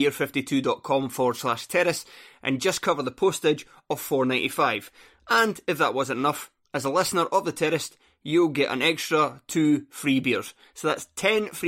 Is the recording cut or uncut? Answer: uncut